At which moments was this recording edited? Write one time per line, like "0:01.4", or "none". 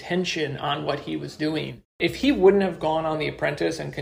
none